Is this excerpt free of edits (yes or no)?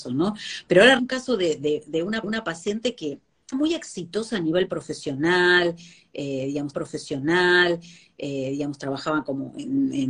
no